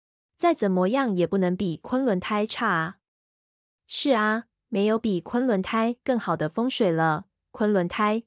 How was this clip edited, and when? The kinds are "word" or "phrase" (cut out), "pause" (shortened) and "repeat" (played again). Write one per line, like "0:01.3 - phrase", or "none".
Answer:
none